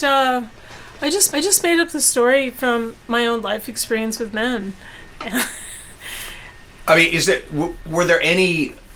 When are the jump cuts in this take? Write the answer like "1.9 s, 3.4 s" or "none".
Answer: 1.3 s, 3.0 s